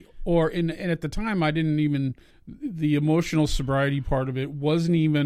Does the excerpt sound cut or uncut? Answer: cut